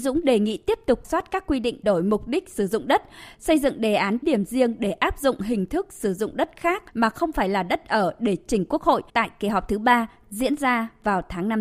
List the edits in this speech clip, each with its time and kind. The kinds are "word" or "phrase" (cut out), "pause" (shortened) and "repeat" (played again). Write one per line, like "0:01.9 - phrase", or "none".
0:01.0 - word
0:01.8 - phrase
0:04.2 - word
0:06.9 - pause
0:09.1 - pause